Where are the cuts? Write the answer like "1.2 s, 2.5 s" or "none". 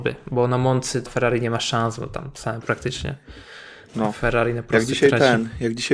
1.1 s, 2.6 s

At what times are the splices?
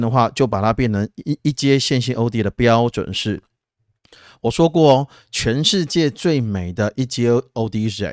none

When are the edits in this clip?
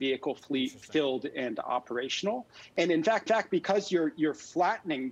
3.3 s

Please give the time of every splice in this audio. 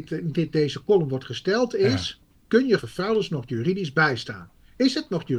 2.3 s, 2.8 s

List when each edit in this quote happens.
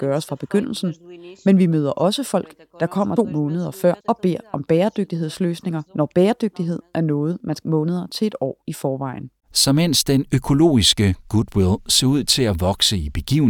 3.2 s, 4.0 s, 5.9 s, 7.6 s, 9.4 s

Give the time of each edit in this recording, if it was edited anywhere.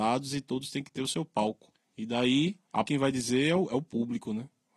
2.8 s

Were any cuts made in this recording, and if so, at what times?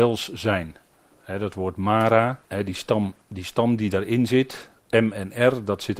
2.4 s, 3.2 s

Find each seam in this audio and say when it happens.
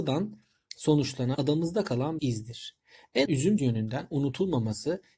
1.3 s, 2.2 s, 3.3 s, 3.6 s

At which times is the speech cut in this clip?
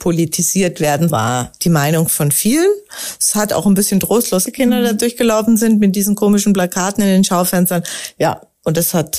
1.1 s, 4.5 s

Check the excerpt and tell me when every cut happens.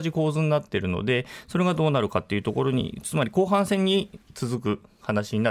4.2 s

